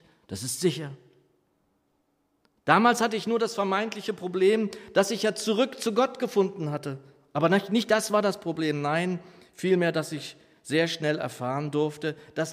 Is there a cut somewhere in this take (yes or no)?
no